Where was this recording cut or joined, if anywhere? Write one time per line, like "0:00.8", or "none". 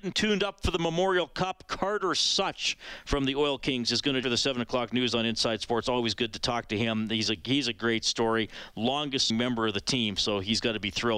0:04.2
0:09.3